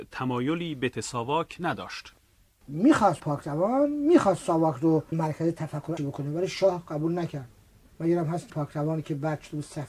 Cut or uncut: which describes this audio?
cut